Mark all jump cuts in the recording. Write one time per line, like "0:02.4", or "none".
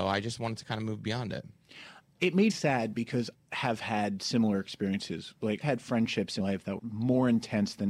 0:02.5
0:03.3
0:05.6
0:06.4
0:06.8